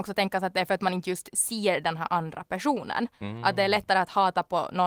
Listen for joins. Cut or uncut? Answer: uncut